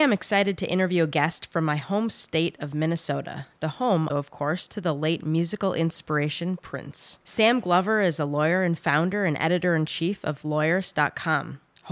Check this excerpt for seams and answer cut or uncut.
cut